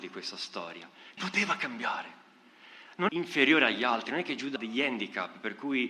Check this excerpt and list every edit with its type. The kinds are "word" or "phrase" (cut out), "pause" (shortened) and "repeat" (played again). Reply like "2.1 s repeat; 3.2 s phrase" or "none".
1.2 s word; 3.1 s phrase; 4.6 s word